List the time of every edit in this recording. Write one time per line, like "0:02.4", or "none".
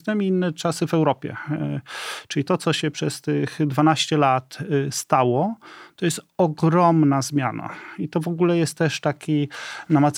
none